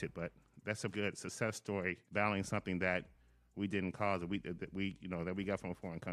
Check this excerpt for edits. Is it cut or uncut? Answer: cut